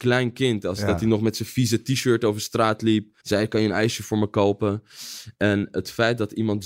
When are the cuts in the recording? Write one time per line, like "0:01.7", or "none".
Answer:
0:03.2